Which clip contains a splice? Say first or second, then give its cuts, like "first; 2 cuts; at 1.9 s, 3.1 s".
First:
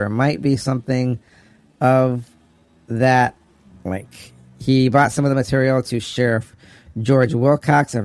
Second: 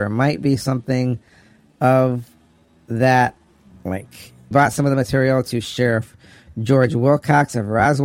second; 1 cut; at 4.5 s